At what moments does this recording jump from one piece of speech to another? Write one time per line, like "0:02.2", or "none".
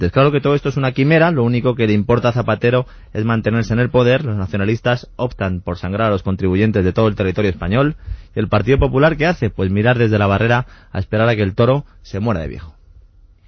none